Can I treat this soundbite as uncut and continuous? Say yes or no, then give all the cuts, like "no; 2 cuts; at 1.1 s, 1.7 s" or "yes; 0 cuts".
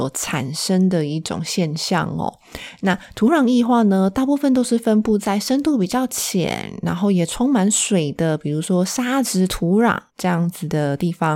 no; 1 cut; at 10.1 s